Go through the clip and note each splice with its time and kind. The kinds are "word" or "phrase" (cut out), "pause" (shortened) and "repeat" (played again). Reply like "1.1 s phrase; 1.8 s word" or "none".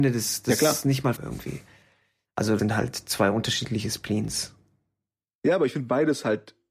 1.2 s word; 2.6 s word